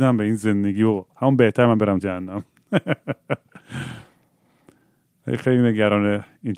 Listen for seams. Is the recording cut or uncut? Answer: cut